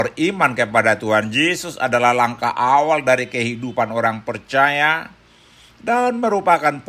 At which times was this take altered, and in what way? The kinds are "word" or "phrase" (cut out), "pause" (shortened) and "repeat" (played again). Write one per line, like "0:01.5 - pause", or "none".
none